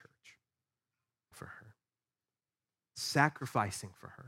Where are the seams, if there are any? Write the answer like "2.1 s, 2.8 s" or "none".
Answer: 1.3 s